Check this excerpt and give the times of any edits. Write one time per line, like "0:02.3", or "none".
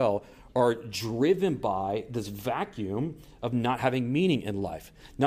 none